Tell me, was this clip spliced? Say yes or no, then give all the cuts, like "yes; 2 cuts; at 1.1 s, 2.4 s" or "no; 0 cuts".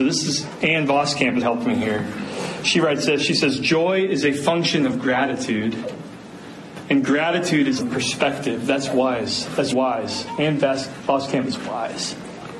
yes; 3 cuts; at 1.4 s, 7.8 s, 9.7 s